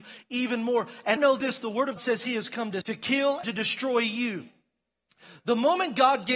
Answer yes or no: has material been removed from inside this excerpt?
yes